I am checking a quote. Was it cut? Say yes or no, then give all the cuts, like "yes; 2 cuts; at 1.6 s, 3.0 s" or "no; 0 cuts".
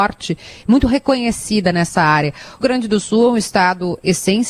yes; 1 cut; at 2.6 s